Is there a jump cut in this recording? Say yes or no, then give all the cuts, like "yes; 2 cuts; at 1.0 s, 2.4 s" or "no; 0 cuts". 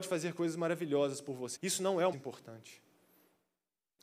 yes; 2 cuts; at 1.6 s, 2.1 s